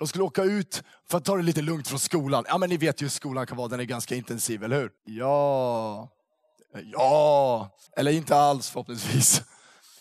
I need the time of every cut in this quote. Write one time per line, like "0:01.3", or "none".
0:05.0
0:07.9

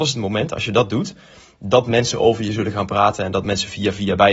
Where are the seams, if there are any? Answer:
none

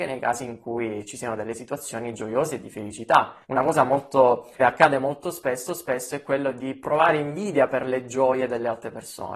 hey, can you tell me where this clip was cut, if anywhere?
0:03.4
0:04.6
0:05.7

